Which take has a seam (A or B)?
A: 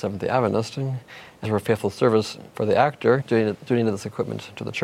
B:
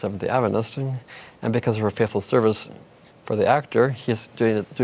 A